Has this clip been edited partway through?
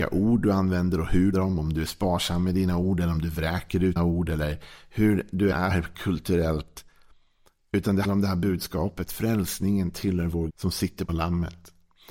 yes; 6 cuts; at 1.3 s, 4.0 s, 5.5 s, 8.0 s, 10.5 s, 11.1 s

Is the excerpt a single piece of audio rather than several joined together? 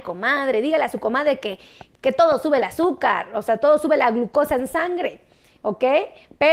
yes; 0 cuts

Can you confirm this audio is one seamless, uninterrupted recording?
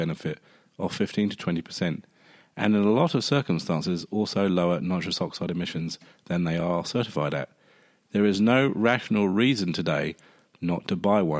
yes; 0 cuts

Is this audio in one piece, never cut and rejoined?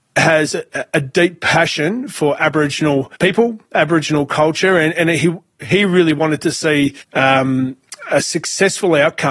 no; 2 cuts; at 3.2 s, 7.0 s

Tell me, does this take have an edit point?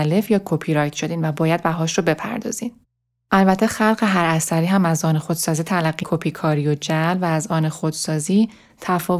yes; 1 cut; at 6.0 s

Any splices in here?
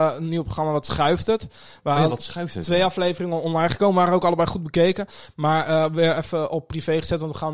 no; 0 cuts

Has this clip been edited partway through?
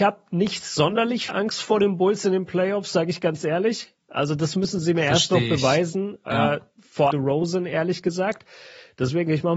yes; 2 cuts; at 1.3 s, 7.1 s

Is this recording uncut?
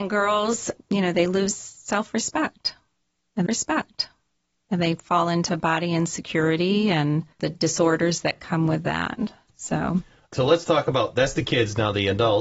no; 3 cuts; at 3.5 s, 7.3 s, 10.3 s

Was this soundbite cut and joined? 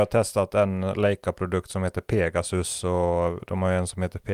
no; 0 cuts

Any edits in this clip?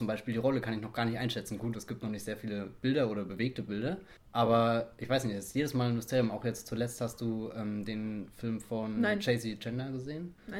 no; 0 cuts

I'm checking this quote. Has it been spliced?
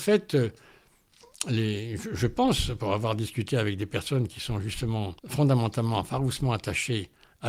yes; 1 cut; at 5.2 s

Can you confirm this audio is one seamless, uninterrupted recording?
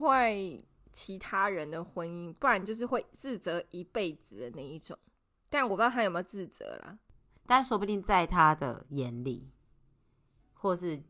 yes; 0 cuts

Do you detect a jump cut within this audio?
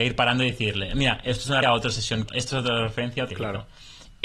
yes; 3 cuts; at 1.6 s, 2.3 s, 3.3 s

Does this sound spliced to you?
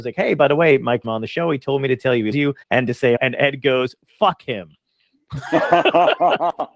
yes; 4 cuts; at 1.0 s, 2.3 s, 2.6 s, 3.2 s

